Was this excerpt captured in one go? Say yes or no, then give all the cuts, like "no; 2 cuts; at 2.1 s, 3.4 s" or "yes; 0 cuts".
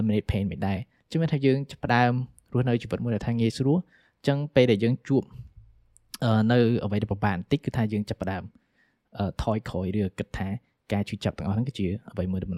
yes; 0 cuts